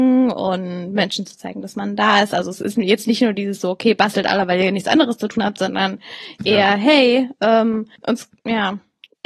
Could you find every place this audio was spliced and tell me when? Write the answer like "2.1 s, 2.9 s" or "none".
8.0 s